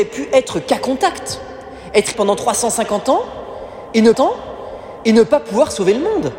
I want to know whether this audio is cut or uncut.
cut